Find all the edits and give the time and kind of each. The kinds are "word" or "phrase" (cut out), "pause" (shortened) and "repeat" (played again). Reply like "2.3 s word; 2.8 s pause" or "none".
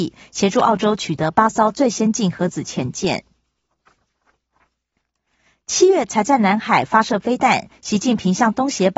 none